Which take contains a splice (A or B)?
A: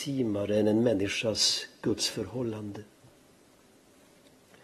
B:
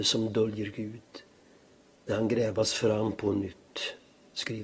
B